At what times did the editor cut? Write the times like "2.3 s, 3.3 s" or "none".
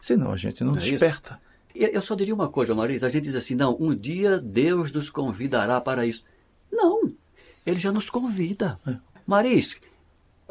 none